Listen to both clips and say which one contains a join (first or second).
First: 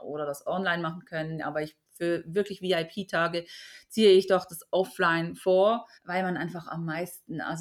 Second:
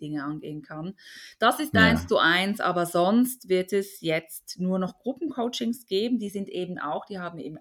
first